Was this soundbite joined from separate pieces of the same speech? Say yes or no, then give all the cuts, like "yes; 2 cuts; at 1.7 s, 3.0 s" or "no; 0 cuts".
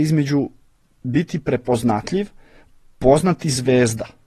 no; 0 cuts